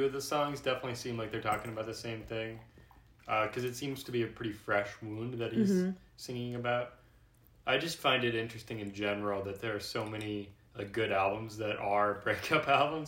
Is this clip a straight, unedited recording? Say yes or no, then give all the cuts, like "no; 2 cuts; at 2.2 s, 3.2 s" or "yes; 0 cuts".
yes; 0 cuts